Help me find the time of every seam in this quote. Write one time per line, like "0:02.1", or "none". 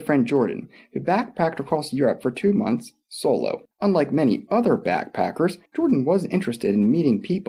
0:03.7
0:05.7